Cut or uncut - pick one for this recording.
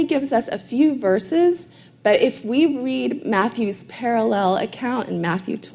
uncut